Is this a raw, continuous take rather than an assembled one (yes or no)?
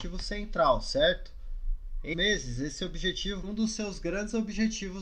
no